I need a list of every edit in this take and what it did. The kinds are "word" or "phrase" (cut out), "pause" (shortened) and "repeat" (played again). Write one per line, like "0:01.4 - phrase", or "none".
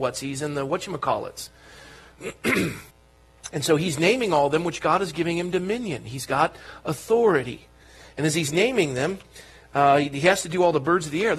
0:02.9 - pause

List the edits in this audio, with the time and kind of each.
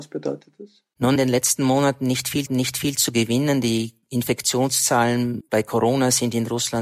0:01.2 - phrase
0:02.5 - repeat
0:05.4 - word

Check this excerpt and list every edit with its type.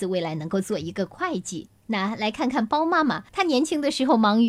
0:01.8 - pause
0:03.3 - pause

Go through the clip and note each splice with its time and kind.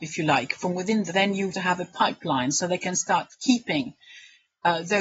0:01.1 - word
0:01.5 - phrase

